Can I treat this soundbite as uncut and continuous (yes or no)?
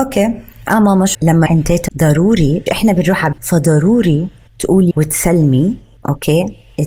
no